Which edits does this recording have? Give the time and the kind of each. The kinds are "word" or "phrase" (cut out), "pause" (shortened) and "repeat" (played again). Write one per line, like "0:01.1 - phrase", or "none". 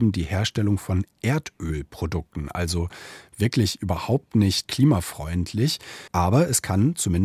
0:06.1 - pause